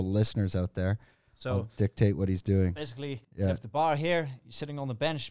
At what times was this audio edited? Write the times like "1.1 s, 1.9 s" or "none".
3.2 s